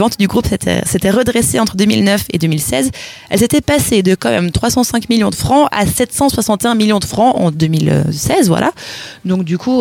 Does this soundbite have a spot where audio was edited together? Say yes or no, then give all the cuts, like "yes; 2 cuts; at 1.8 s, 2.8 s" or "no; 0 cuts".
no; 0 cuts